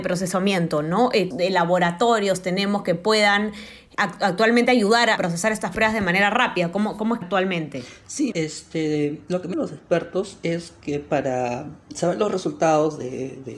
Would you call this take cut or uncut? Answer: cut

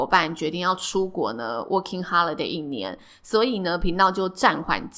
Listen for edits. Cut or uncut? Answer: uncut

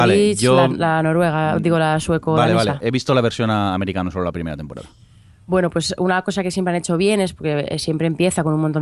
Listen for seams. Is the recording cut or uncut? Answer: uncut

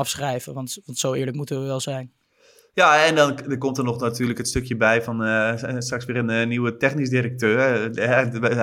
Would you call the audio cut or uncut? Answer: uncut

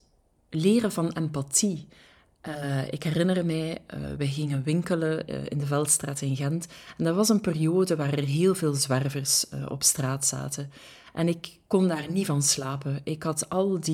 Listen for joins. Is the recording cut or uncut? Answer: uncut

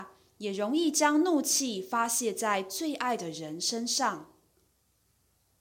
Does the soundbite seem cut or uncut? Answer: uncut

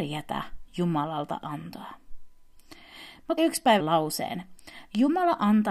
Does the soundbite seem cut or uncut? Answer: cut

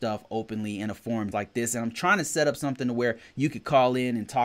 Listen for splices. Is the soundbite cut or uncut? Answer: cut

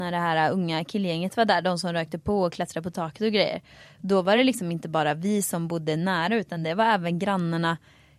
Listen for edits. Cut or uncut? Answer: uncut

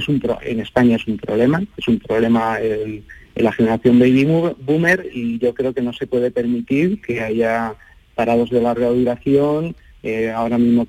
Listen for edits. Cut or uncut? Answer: uncut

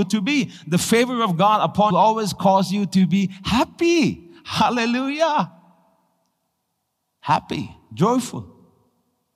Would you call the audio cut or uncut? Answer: cut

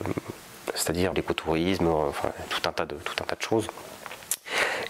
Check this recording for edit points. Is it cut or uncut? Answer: cut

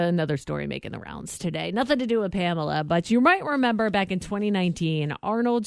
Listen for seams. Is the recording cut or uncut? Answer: uncut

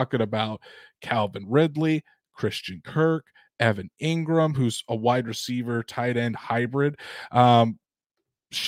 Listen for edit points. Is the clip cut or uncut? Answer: uncut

